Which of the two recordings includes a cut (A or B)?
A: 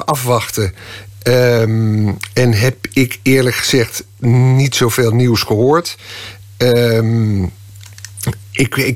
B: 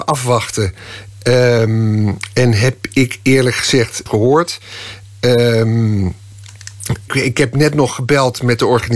B